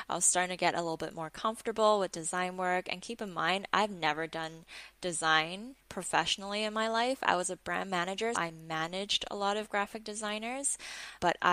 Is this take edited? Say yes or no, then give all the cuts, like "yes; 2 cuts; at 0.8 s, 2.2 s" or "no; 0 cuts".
yes; 1 cut; at 8.3 s